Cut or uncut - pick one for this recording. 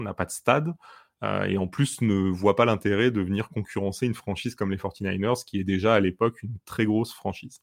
uncut